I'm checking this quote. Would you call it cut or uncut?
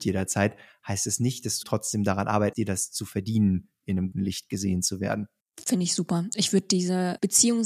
cut